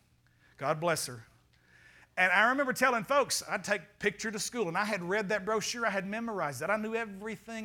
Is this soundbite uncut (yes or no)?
yes